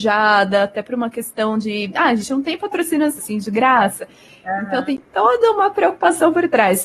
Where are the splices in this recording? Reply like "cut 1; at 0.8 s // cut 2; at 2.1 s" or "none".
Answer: cut 1; at 3.2 s